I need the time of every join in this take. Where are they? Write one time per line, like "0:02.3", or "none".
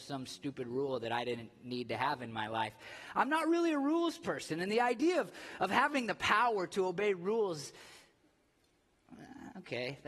none